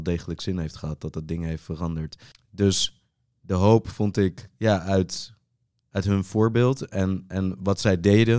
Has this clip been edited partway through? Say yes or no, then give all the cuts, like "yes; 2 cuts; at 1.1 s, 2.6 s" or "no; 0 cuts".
no; 0 cuts